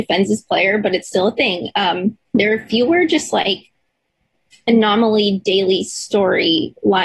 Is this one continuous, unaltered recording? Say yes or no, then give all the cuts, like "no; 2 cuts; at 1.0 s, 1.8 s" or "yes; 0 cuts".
no; 2 cuts; at 2.3 s, 4.1 s